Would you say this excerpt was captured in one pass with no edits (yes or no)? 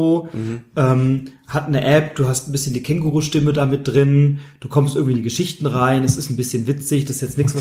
yes